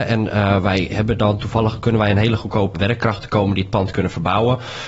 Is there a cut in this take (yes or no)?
yes